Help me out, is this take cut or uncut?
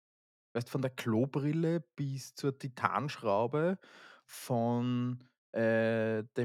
uncut